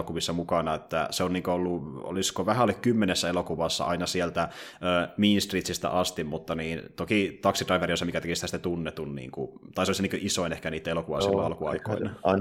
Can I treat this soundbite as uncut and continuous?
yes; 0 cuts

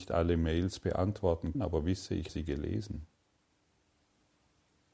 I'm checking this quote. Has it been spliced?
yes; 2 cuts; at 1.5 s, 2.3 s

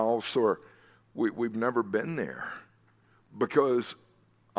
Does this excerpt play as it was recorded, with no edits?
yes; 0 cuts

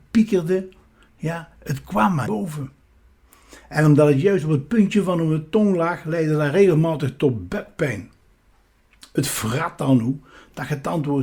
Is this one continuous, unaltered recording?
no; 1 cut; at 2.3 s

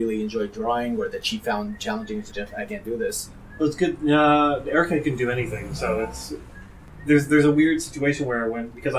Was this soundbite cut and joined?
yes; 1 cut; at 2.3 s

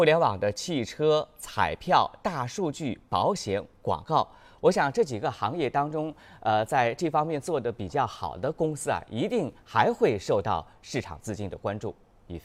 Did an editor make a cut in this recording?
no; 0 cuts

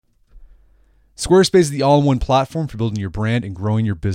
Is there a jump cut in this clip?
no; 0 cuts

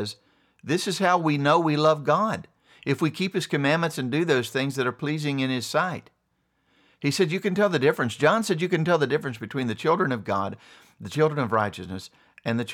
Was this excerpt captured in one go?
yes; 0 cuts

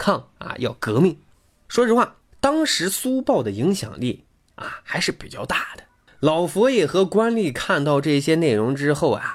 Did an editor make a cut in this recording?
no; 0 cuts

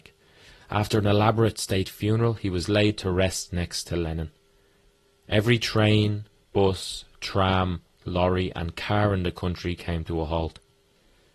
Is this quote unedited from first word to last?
yes; 0 cuts

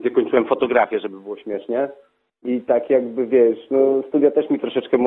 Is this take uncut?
yes; 0 cuts

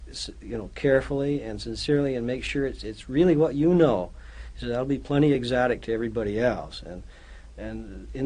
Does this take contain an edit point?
no; 0 cuts

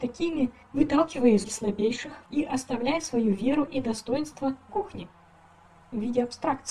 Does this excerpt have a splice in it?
yes; 3 cuts; at 1.4 s, 2.3 s, 4.7 s

